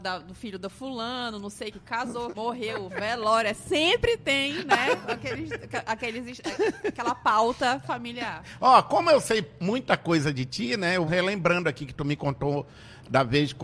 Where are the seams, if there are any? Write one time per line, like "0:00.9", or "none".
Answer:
0:01.7
0:02.3
0:11.1

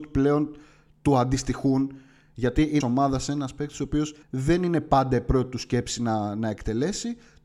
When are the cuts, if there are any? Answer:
0:02.8
0:04.2

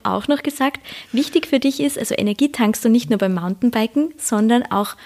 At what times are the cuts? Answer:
none

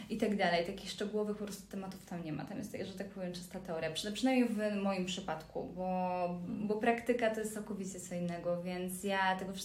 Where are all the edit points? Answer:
none

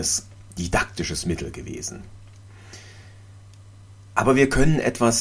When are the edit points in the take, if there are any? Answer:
none

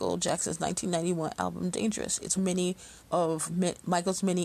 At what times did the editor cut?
0:02.4
0:03.0

